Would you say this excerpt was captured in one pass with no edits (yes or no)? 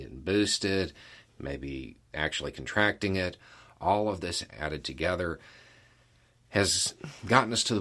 no